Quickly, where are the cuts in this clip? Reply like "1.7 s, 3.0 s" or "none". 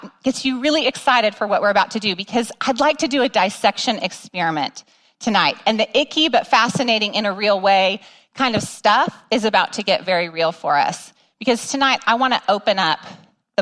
none